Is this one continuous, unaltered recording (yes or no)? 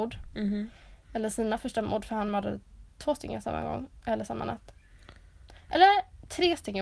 yes